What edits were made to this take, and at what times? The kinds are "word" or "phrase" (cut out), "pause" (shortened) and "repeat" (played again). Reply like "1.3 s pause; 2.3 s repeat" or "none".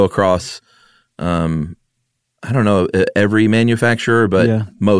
none